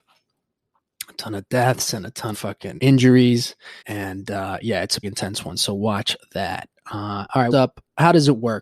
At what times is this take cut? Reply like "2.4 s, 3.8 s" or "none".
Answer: 2.3 s, 2.8 s, 3.8 s, 5.0 s, 7.5 s